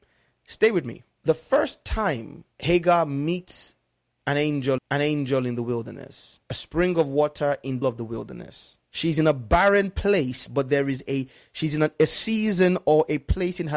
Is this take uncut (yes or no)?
no